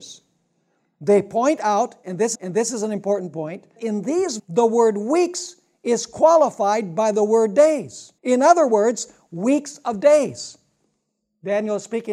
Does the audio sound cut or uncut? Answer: cut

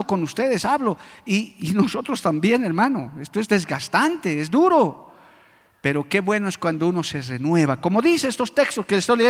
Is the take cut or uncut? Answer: uncut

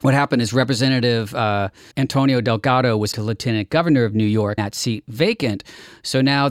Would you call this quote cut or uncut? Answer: cut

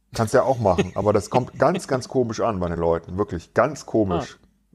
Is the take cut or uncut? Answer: uncut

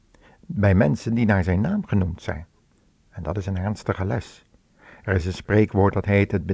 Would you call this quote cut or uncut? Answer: uncut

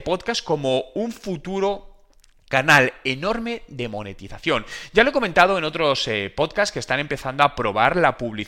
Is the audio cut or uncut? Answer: uncut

